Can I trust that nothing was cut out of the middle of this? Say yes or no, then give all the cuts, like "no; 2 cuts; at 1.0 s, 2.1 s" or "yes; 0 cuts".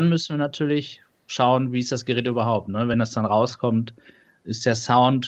yes; 0 cuts